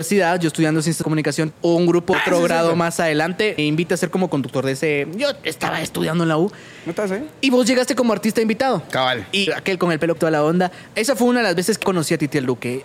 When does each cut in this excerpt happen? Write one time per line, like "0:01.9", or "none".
0:01.0
0:01.5
0:02.1
0:03.6
0:09.5
0:10.2
0:11.8